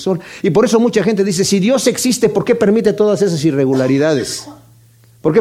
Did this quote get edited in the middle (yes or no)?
no